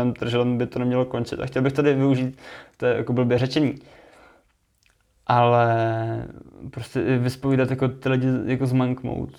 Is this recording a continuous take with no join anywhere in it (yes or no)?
yes